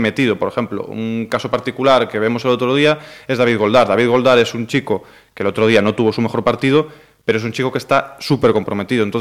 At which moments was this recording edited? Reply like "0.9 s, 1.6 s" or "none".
none